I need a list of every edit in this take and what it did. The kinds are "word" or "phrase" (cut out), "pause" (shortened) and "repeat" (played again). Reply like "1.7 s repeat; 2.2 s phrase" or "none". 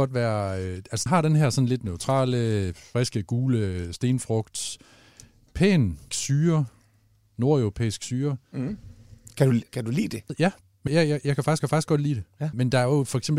1.1 s word; 6.1 s word; 9.7 s pause; 10.9 s word; 11.6 s repeat